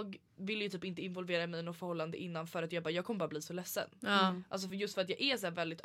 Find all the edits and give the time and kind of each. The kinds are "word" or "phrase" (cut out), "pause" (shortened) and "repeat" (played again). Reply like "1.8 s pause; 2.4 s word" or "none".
none